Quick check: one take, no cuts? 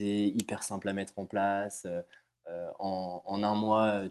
yes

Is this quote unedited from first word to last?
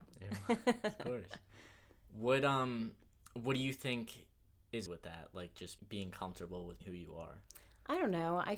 no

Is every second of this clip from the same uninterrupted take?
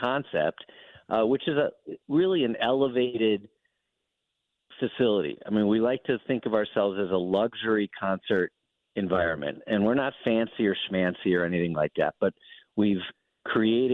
yes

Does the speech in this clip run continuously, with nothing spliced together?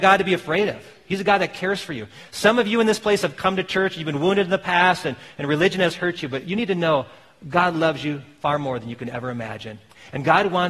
yes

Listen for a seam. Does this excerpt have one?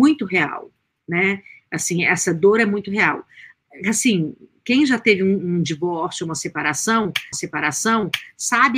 yes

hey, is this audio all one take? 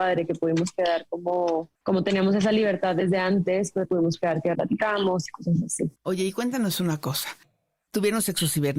no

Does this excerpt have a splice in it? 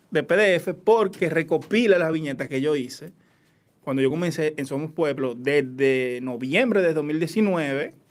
no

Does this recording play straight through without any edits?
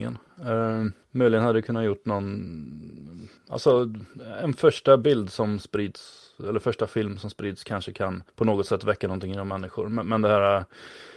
no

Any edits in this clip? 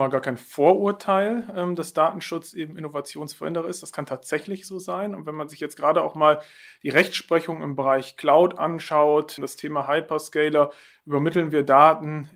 no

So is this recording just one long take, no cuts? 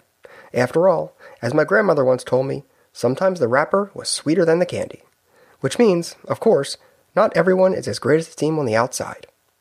yes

